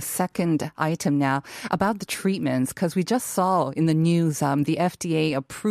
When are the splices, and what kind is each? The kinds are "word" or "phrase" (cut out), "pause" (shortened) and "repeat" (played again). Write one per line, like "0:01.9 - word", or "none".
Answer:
none